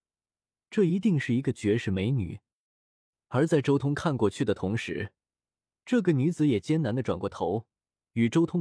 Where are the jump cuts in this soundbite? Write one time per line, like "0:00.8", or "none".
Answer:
none